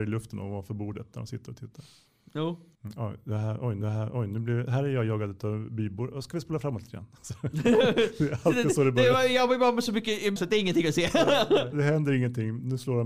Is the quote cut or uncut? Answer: cut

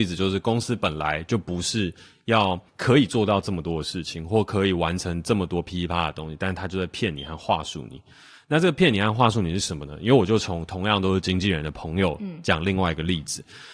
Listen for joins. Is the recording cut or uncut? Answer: cut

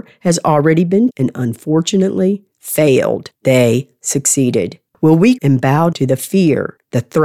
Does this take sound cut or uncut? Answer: cut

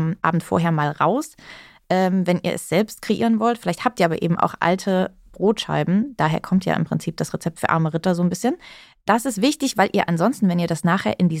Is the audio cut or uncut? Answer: uncut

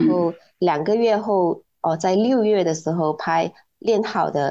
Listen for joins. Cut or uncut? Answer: uncut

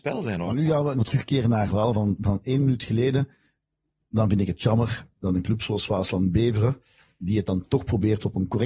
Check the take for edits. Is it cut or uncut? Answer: cut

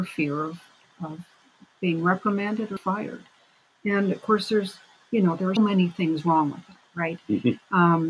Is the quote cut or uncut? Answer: cut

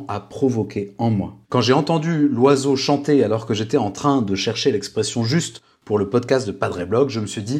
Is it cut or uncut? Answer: cut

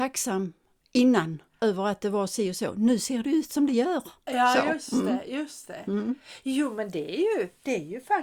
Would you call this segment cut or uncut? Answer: uncut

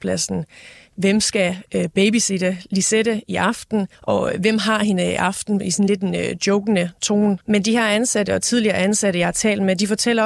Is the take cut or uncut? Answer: cut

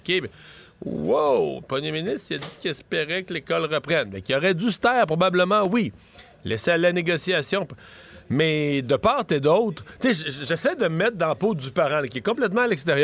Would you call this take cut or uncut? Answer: uncut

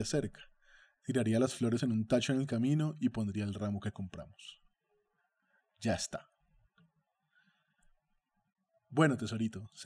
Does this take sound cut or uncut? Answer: uncut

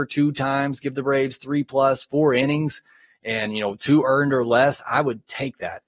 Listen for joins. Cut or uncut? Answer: uncut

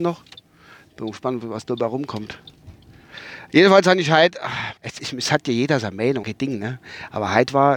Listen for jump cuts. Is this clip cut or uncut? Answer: cut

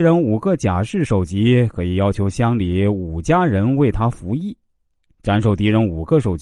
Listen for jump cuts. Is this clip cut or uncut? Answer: uncut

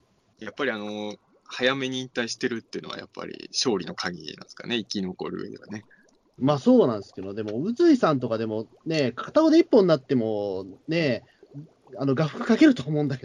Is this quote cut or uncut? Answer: uncut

